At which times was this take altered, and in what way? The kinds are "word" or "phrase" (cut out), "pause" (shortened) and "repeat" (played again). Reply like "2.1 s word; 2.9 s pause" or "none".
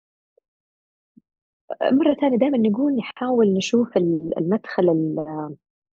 none